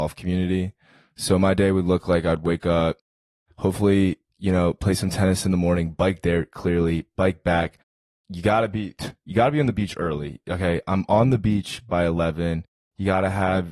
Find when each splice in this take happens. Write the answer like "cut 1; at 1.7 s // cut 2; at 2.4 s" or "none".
none